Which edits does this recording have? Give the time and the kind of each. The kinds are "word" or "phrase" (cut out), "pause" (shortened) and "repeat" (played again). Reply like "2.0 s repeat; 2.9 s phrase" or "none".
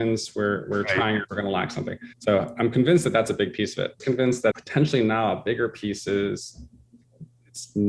1.3 s word; 2.1 s pause; 4.0 s phrase; 4.5 s word